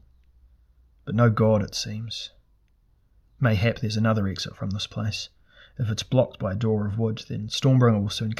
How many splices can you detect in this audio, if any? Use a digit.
0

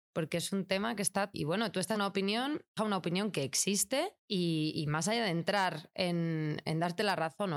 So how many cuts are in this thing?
4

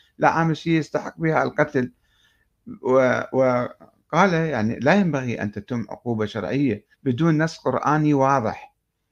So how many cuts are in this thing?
1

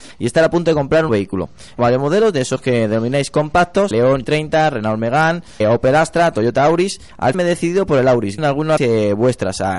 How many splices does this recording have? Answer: 8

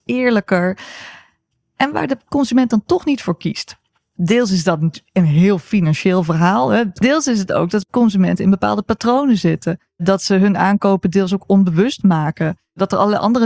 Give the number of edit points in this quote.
0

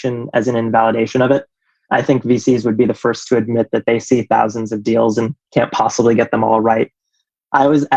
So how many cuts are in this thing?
0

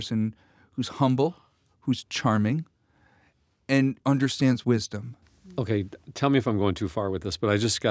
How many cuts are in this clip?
1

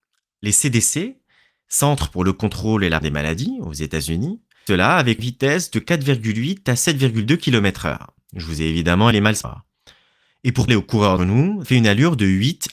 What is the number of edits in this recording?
8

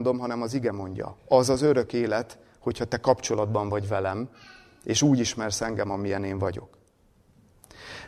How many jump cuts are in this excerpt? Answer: 0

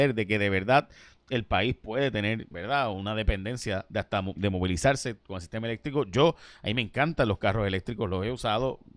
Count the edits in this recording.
2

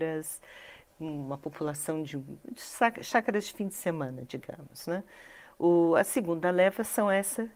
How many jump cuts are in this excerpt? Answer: 0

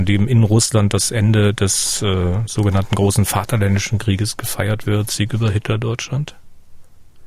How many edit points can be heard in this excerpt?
0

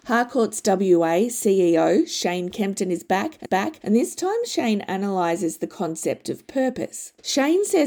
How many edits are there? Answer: 1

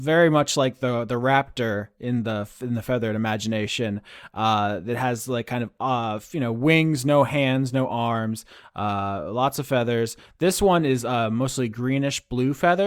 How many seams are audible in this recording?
0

